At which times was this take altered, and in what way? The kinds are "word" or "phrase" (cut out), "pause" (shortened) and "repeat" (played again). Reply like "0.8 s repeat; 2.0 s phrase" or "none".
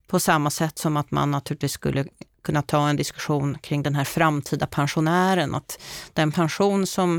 none